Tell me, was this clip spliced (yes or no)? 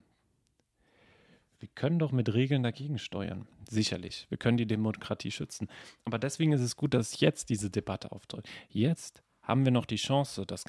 yes